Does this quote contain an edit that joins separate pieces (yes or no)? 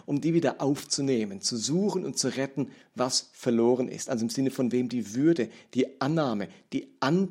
no